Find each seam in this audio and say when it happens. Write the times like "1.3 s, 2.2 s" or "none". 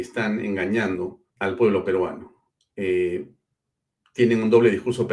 1.3 s, 2.5 s